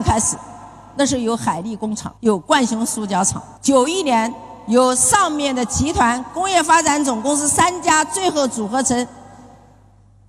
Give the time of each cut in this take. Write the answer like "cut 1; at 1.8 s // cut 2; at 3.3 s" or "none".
cut 1; at 2.2 s // cut 2; at 3.6 s